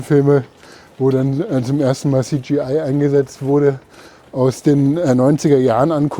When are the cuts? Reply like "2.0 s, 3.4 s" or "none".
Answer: none

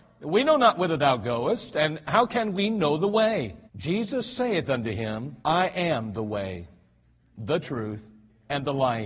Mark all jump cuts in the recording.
3.7 s, 5.4 s

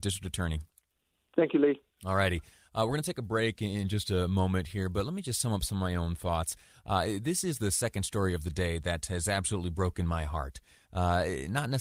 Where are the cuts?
none

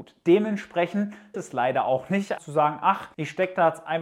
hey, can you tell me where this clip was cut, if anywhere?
1.3 s, 2.4 s

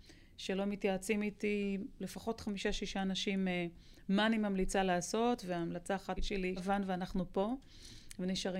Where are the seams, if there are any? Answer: 6.2 s, 6.6 s

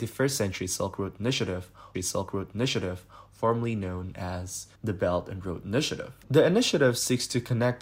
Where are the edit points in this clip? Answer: 1.9 s, 4.8 s, 6.2 s

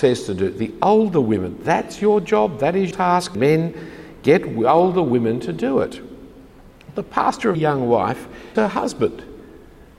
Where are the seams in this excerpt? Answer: 2.9 s, 3.3 s, 7.5 s, 8.6 s

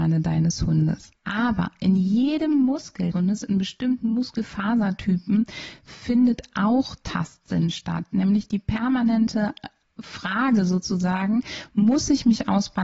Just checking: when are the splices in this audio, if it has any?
1.1 s, 3.1 s, 9.8 s

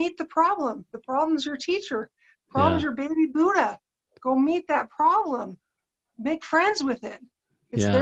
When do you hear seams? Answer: none

